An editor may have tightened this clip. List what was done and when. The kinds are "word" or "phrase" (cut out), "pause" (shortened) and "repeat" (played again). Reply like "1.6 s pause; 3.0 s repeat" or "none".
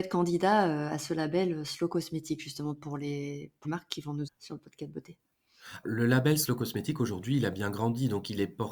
3.6 s word; 4.3 s word; 5.8 s word

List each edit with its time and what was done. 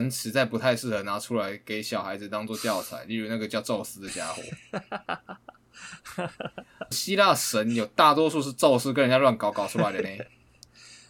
6.9 s phrase

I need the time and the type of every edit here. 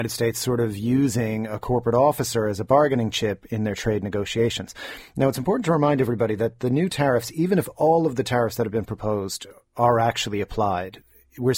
none

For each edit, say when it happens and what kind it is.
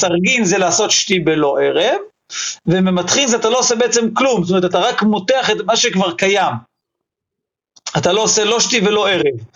none

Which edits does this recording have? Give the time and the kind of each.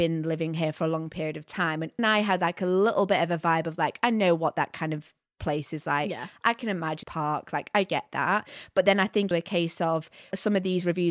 2.0 s word; 7.0 s phrase; 9.3 s phrase

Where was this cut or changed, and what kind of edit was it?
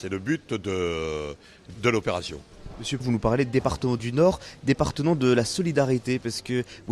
1.7 s word; 3.0 s word

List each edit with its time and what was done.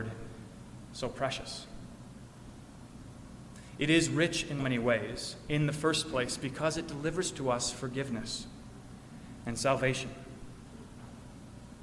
4.6 s word

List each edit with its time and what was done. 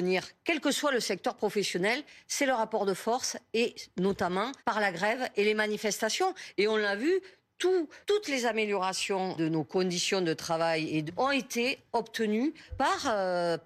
4.6 s pause; 8.0 s pause; 9.4 s word; 11.1 s word; 12.7 s word

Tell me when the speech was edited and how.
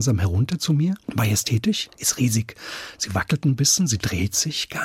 1.0 s pause

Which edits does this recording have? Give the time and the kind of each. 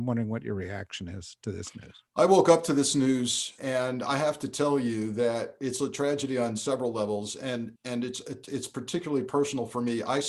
2.1 s pause; 3.6 s phrase; 7.8 s pause; 8.5 s word

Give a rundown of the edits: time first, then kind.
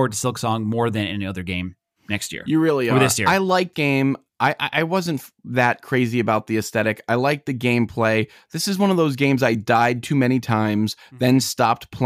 3.7 s word

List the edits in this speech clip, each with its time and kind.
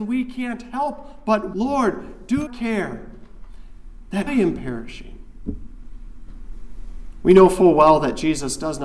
1.5 s word; 2.5 s phrase; 4.3 s word

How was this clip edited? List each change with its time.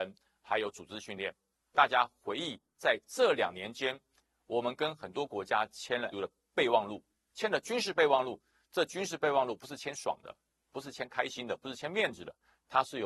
6.1 s word

